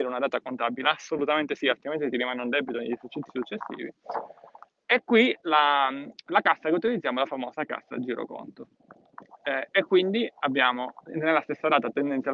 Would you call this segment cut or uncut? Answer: uncut